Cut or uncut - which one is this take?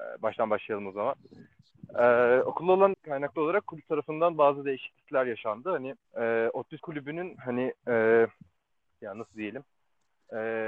cut